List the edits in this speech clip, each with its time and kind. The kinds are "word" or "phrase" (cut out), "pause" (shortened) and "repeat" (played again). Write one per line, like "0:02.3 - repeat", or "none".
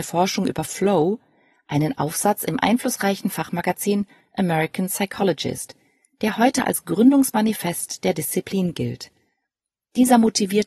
none